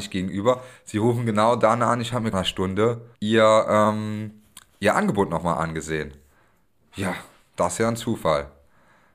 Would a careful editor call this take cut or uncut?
cut